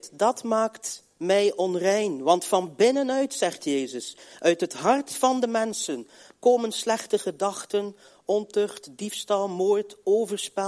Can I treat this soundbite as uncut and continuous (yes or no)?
yes